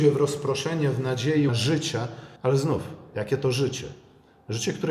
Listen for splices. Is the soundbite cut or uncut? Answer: cut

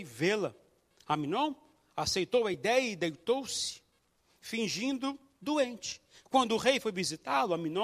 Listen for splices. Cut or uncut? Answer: uncut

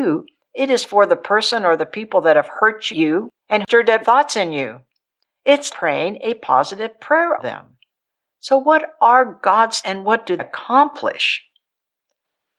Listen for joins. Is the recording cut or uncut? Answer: cut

